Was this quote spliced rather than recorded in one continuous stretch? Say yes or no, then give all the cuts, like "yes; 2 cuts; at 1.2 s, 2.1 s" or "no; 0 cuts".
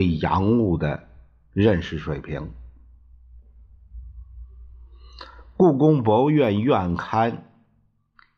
no; 0 cuts